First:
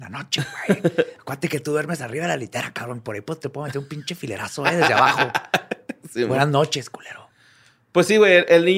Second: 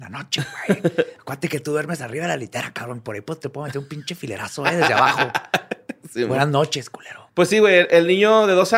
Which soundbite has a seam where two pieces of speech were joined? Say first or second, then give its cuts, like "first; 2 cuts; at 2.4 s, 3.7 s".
second; 1 cut; at 7.3 s